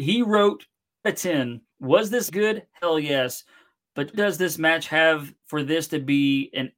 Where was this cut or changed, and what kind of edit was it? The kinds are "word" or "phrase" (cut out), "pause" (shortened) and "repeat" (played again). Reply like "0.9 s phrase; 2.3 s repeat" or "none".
1.0 s phrase; 1.7 s pause; 2.3 s word; 4.1 s word; 5.4 s pause

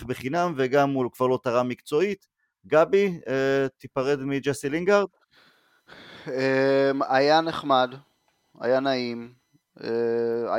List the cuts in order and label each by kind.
none

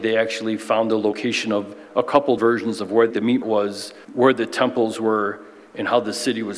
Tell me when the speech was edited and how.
2.4 s word; 3.1 s word; 3.4 s word; 4.0 s pause

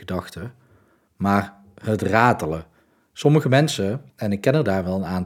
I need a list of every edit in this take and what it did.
4.1 s pause

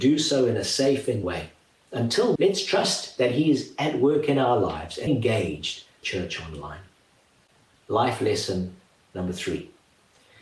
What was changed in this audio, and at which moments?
1.2 s word; 2.4 s word; 5.1 s word; 6.0 s word

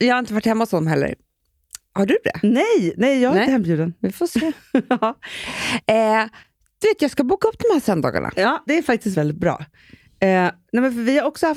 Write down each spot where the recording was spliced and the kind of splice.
3.5 s word; 8.7 s word; 9.1 s word

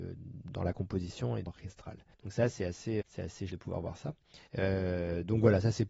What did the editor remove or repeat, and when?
1.5 s word; 2.1 s pause; 3.0 s word; 3.5 s word; 4.5 s pause

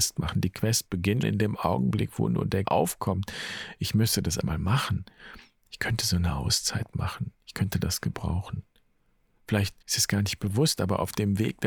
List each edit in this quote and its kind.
1.2 s word; 2.7 s word; 4.4 s word; 9.8 s pause

